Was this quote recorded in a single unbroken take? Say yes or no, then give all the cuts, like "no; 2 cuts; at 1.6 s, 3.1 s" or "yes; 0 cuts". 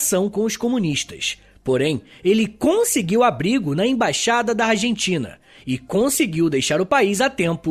yes; 0 cuts